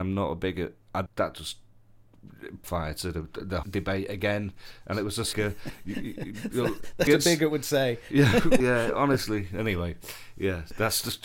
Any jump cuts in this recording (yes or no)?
yes